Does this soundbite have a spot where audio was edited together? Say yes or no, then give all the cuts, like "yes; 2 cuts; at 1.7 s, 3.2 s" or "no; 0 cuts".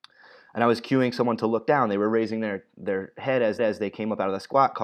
yes; 1 cut; at 3.6 s